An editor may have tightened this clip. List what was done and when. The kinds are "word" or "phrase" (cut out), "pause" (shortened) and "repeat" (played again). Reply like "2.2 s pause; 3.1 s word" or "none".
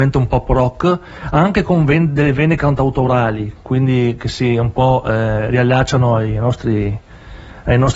none